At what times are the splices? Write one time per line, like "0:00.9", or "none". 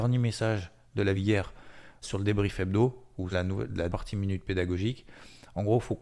0:01.2
0:02.0
0:03.3
0:03.9